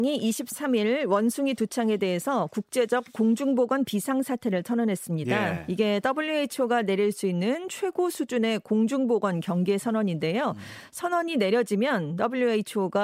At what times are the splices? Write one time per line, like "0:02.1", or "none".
none